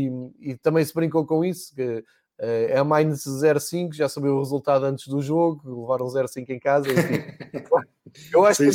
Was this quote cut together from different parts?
no; 0 cuts

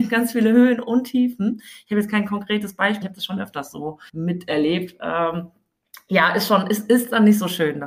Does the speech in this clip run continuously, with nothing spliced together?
no; 2 cuts; at 3.0 s, 4.1 s

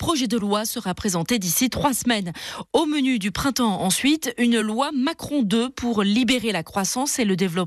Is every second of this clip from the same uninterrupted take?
yes; 0 cuts

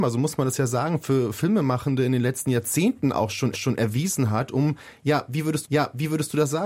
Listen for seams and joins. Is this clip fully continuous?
no; 2 cuts; at 3.5 s, 5.6 s

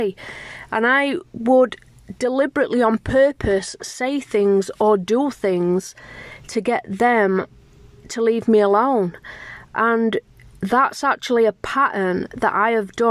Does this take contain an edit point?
no; 0 cuts

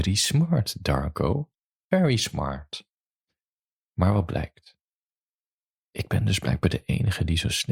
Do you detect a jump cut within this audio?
no; 0 cuts

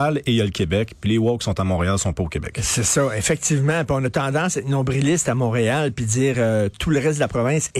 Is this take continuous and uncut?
yes; 0 cuts

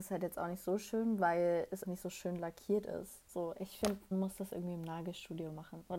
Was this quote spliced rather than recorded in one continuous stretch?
yes; 2 cuts; at 1.8 s, 4.1 s

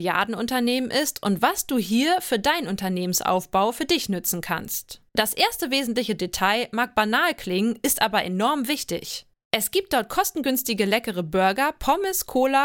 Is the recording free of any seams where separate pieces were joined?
no; 2 cuts; at 5.1 s, 9.3 s

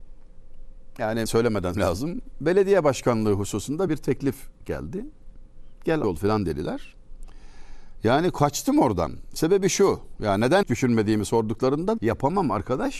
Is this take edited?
yes; 6 cuts; at 1.3 s, 1.7 s, 3.9 s, 6.0 s, 10.6 s, 12.0 s

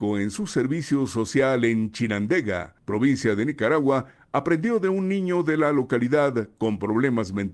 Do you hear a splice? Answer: no; 0 cuts

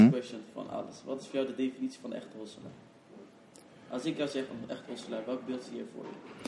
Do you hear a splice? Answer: no; 0 cuts

